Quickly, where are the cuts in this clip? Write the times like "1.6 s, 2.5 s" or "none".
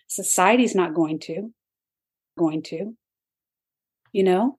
2.4 s